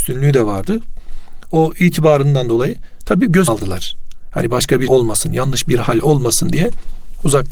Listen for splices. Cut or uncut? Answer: cut